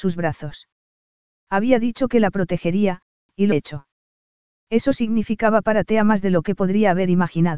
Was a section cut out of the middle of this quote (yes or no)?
yes